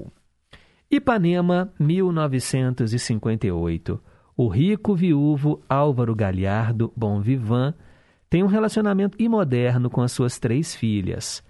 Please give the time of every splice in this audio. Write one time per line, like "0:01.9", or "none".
0:07.0
0:09.1